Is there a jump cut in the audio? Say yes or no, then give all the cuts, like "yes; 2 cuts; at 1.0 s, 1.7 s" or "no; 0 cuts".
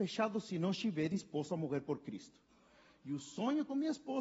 no; 0 cuts